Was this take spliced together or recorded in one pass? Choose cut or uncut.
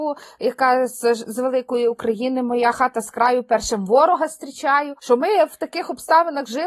uncut